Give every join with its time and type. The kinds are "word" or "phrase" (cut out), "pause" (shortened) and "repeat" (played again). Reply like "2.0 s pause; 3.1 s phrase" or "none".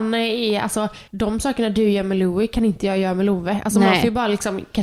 1.1 s pause